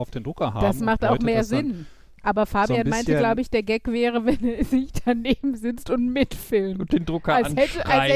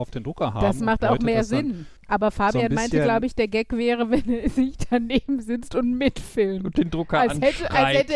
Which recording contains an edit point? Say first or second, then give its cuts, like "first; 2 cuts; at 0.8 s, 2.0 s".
second; 1 cut; at 2.0 s